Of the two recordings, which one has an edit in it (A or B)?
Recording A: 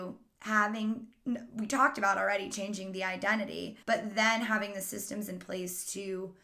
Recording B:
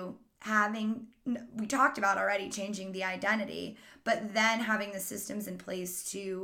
A